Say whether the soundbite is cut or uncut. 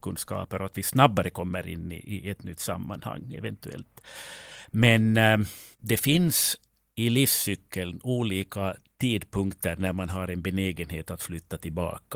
cut